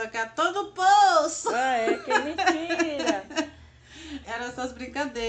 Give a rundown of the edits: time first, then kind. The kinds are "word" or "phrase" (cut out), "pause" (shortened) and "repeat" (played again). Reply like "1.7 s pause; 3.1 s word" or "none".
4.2 s word